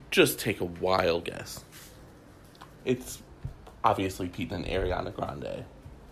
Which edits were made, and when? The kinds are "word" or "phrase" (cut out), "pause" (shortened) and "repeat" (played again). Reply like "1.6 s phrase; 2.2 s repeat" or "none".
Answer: 1.2 s word; 2.8 s word; 4.5 s word